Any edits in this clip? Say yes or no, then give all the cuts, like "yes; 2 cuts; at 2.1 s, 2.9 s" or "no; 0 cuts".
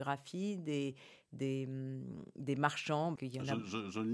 yes; 1 cut; at 3.2 s